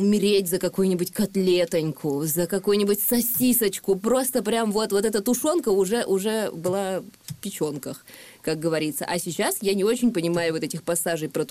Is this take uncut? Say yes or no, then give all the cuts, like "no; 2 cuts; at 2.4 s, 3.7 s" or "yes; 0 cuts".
yes; 0 cuts